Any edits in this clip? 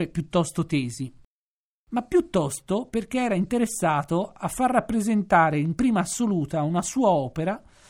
no; 0 cuts

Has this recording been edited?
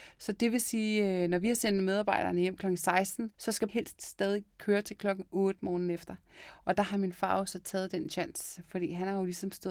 yes; 2 cuts; at 3.3 s, 3.7 s

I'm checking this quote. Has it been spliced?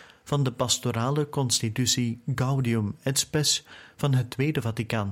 no; 0 cuts

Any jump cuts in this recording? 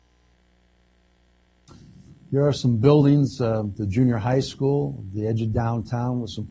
no; 0 cuts

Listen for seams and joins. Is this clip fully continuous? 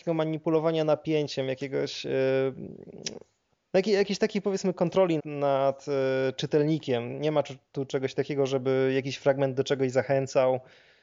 no; 1 cut; at 5.2 s

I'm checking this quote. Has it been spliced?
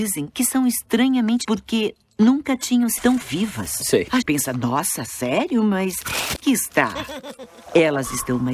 yes; 4 cuts; at 1.4 s, 3.0 s, 4.2 s, 6.4 s

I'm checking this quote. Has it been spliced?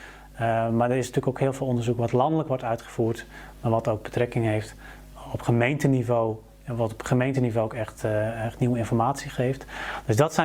no; 0 cuts

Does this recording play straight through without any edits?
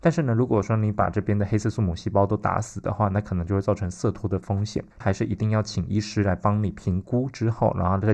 no; 1 cut; at 4.9 s

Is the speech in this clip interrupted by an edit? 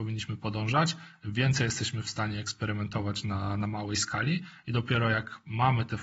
no; 0 cuts

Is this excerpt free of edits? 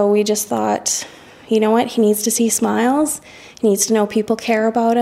yes; 0 cuts

